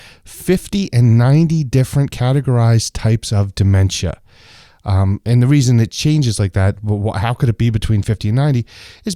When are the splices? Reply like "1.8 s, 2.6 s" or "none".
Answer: none